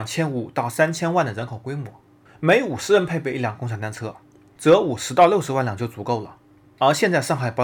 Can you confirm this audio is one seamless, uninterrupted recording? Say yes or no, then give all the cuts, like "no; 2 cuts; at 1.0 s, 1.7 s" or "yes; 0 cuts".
yes; 0 cuts